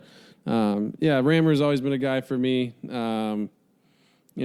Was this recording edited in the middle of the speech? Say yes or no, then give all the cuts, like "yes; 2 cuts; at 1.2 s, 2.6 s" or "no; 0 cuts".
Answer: no; 0 cuts